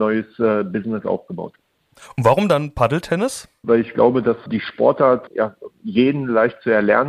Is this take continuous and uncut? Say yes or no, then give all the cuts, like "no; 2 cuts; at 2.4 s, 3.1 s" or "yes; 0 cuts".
no; 1 cut; at 5.7 s